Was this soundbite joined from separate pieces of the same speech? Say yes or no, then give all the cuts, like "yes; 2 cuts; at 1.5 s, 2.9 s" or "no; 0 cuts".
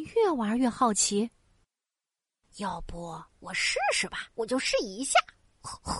yes; 2 cuts; at 3.3 s, 4.3 s